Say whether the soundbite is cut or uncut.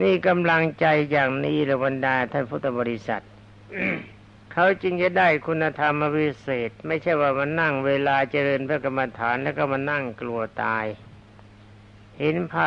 cut